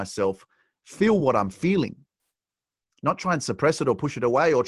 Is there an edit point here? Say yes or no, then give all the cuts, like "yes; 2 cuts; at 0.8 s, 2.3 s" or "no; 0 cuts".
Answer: no; 0 cuts